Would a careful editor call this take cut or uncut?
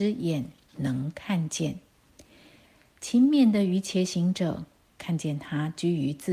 uncut